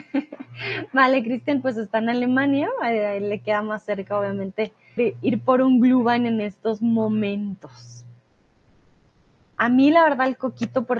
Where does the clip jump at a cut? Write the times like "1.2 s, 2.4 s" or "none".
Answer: 5.0 s